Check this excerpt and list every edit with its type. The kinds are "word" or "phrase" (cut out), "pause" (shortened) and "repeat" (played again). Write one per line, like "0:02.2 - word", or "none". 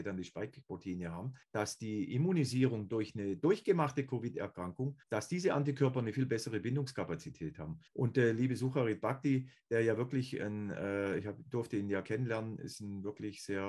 0:01.4 - pause
0:05.0 - pause
0:07.9 - pause